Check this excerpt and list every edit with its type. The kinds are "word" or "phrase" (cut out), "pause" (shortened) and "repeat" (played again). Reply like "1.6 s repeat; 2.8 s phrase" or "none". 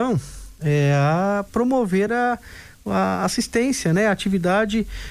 none